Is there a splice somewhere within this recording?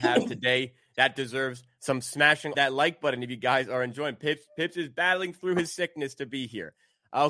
yes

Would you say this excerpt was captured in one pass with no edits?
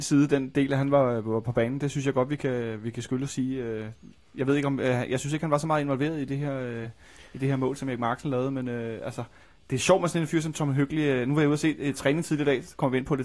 yes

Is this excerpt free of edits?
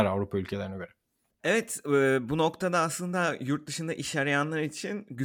yes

